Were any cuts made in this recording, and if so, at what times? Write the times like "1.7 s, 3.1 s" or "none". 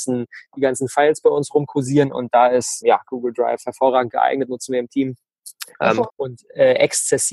2.8 s, 6.1 s